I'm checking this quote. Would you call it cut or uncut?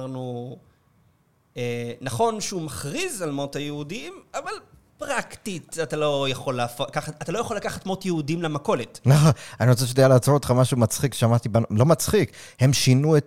uncut